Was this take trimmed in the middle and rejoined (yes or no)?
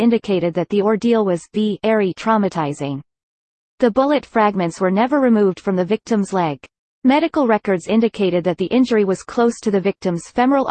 no